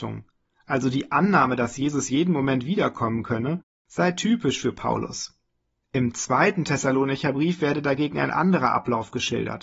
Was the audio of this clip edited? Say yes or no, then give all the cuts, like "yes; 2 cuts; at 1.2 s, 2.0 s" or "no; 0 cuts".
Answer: yes; 1 cut; at 5.7 s